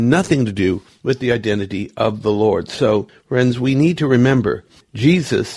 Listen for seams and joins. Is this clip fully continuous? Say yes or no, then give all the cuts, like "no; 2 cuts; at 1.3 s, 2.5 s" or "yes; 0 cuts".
yes; 0 cuts